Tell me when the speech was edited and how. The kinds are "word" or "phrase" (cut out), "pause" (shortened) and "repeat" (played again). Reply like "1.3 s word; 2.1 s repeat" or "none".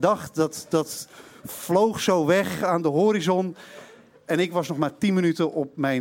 none